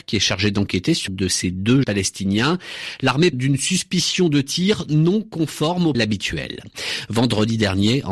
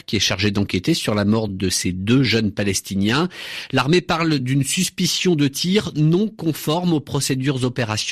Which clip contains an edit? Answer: first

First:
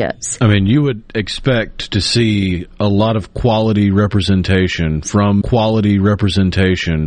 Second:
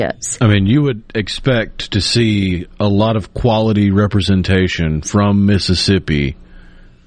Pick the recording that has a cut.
first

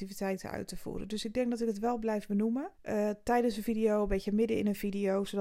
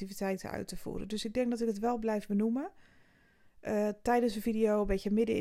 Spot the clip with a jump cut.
first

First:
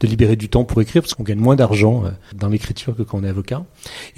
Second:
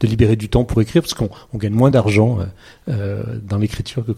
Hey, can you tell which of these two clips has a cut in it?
first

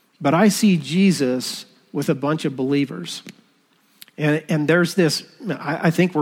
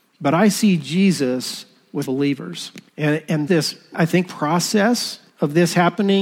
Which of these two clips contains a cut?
second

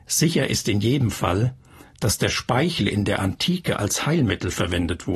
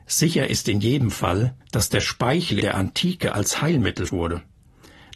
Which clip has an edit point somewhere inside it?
second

